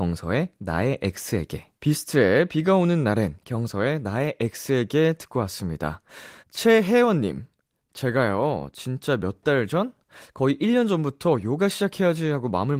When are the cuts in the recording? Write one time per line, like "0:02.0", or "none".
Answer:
0:01.7
0:06.4